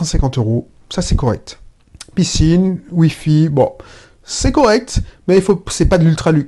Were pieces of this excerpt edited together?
no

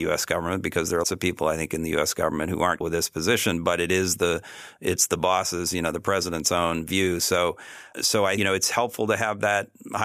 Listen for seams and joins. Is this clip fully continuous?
no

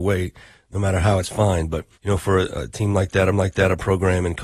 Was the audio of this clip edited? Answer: yes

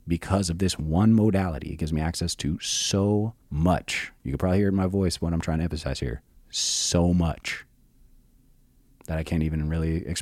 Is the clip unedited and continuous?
no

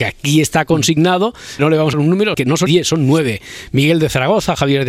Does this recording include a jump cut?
yes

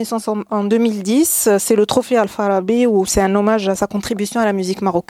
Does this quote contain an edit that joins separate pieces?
no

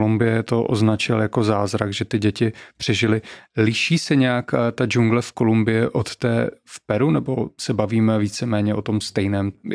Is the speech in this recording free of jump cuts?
yes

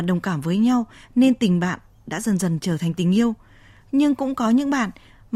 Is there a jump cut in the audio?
no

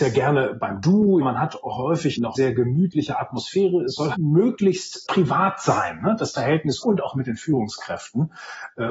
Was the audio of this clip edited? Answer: yes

